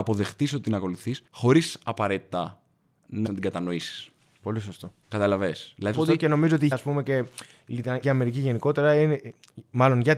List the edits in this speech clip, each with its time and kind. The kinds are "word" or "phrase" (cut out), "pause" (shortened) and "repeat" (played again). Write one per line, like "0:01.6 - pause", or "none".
0:01.3 - pause
0:03.3 - word
0:05.0 - pause
0:05.9 - word
0:06.7 - word
0:08.0 - word